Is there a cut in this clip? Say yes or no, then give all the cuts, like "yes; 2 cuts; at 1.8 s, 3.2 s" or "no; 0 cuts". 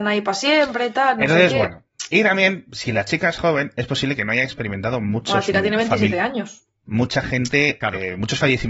no; 0 cuts